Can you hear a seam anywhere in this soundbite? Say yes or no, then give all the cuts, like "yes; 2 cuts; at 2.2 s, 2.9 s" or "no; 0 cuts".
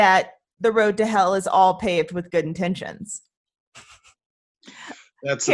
no; 0 cuts